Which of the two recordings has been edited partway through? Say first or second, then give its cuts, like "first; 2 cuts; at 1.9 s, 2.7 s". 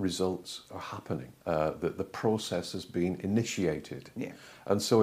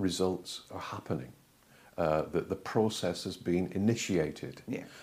first; 1 cut; at 1.4 s